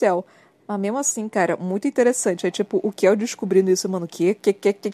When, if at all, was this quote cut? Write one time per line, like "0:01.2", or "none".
none